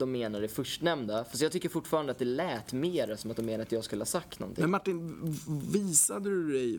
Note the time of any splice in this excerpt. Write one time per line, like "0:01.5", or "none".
none